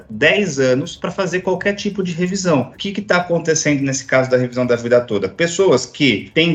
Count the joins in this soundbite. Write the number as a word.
zero